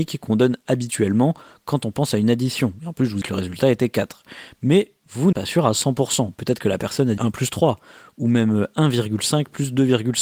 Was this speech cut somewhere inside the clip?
yes; 3 cuts; at 3.2 s, 5.3 s, 7.2 s

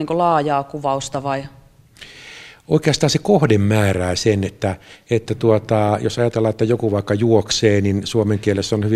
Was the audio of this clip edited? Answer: no; 0 cuts

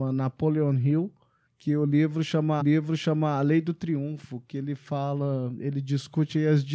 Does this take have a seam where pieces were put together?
yes; 2 cuts; at 1.5 s, 2.6 s

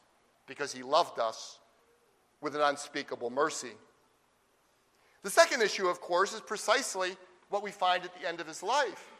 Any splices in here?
no; 0 cuts

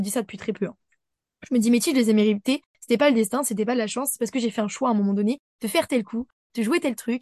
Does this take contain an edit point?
no; 0 cuts

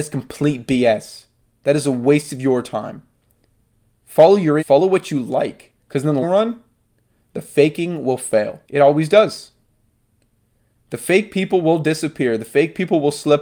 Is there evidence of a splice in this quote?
yes; 4 cuts; at 4.6 s, 5.8 s, 6.2 s, 8.6 s

